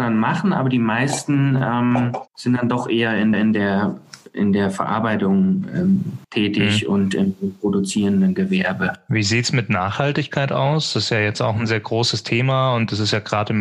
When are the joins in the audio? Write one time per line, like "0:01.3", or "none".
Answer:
0:02.3
0:03.3
0:06.2
0:11.7